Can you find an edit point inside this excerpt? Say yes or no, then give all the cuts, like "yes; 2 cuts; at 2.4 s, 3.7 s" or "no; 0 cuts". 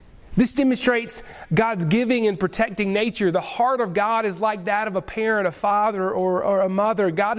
no; 0 cuts